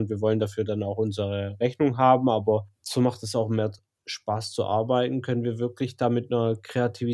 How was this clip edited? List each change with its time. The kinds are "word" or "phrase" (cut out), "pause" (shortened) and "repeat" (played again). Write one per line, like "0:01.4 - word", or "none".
none